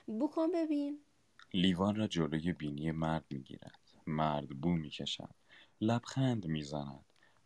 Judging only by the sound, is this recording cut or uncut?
uncut